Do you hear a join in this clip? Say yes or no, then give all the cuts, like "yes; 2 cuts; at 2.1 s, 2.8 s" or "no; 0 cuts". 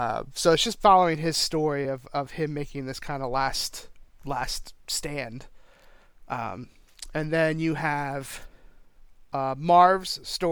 no; 0 cuts